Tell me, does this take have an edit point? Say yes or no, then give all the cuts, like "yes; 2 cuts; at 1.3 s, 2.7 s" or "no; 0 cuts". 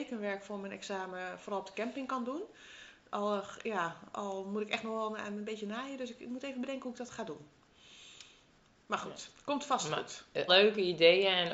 yes; 1 cut; at 10.5 s